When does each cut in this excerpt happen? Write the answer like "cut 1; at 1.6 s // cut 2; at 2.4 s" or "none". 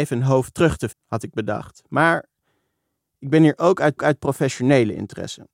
cut 1; at 0.9 s // cut 2; at 4.0 s